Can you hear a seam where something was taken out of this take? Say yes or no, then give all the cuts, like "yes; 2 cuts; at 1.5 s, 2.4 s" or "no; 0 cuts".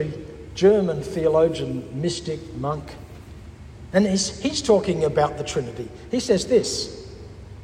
no; 0 cuts